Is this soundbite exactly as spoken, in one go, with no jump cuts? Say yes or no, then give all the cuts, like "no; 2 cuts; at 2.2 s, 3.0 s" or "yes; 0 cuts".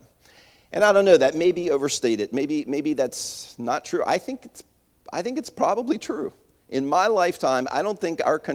yes; 0 cuts